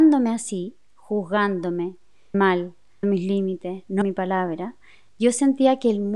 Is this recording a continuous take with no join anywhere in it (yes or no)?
no